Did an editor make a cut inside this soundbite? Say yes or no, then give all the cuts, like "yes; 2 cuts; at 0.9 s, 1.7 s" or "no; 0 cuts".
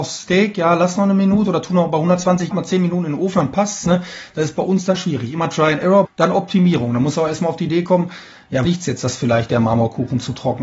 yes; 4 cuts; at 2.5 s, 5.0 s, 6.0 s, 8.6 s